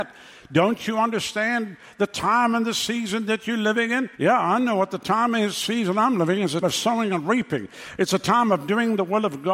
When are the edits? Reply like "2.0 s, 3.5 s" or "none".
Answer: 4.1 s, 6.6 s